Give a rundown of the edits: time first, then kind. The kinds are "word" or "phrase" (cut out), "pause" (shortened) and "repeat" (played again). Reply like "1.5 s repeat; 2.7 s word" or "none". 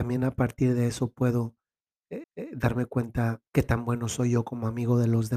2.2 s repeat; 3.5 s pause